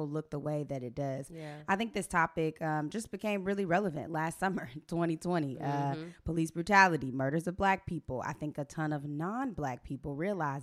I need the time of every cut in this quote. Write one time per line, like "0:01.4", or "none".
none